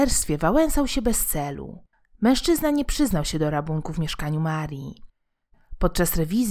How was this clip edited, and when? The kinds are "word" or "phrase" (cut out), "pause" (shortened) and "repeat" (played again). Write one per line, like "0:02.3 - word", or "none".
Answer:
0:01.9 - pause